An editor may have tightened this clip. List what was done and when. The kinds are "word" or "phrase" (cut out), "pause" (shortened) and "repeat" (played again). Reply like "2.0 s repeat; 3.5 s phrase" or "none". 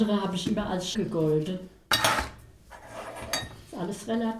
0.9 s word